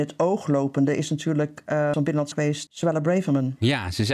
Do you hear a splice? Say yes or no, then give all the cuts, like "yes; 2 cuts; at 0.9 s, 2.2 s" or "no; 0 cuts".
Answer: yes; 3 cuts; at 1.9 s, 2.3 s, 2.7 s